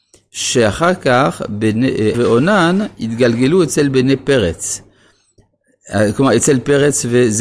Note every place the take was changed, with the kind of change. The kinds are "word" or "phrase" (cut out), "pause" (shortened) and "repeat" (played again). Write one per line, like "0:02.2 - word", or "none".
0:02.1 - word